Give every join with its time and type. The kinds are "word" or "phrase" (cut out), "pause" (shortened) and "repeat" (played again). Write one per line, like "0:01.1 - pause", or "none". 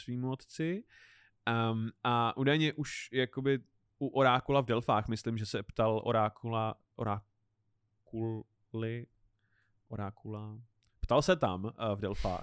none